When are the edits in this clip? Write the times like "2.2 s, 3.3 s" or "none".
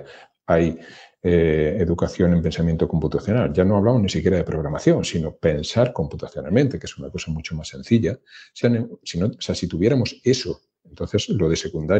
8.6 s